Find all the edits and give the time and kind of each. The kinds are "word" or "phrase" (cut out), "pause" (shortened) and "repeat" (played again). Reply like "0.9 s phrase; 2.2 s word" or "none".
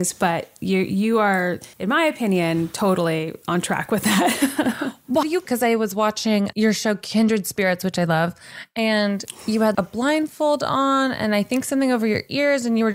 1.7 s pause; 5.2 s word; 9.7 s word